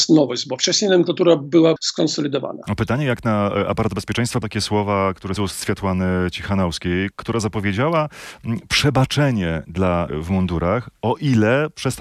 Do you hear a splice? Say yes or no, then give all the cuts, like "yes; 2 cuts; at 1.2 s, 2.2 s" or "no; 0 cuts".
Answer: yes; 5 cuts; at 1.8 s, 4.4 s, 5.4 s, 7.1 s, 10.1 s